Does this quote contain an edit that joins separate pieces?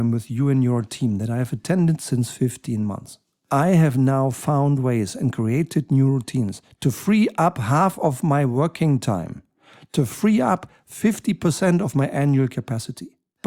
no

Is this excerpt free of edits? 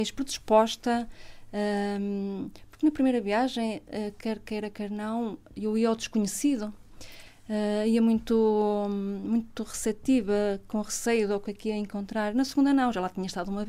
yes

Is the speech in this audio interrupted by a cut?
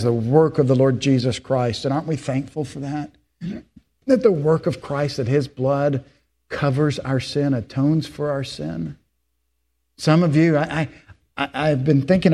no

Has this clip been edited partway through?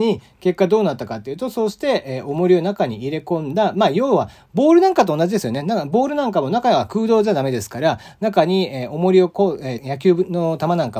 yes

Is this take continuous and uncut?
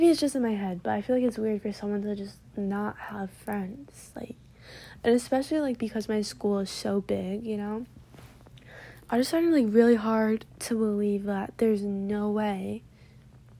yes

